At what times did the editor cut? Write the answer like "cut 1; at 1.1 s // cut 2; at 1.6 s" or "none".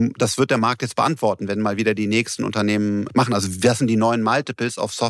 cut 1; at 2.4 s // cut 2; at 3.1 s